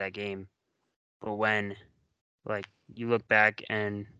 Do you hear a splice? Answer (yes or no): yes